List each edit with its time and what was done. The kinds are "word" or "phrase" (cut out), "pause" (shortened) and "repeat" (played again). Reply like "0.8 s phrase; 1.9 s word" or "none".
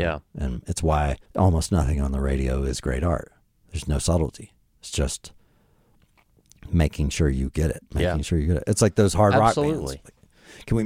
1.2 s pause; 7.9 s pause